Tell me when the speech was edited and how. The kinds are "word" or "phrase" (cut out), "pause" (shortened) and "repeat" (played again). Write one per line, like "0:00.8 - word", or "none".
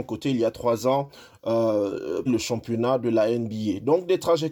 0:02.3 - phrase